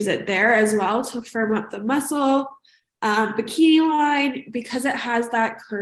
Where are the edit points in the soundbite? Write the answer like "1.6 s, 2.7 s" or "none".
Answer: none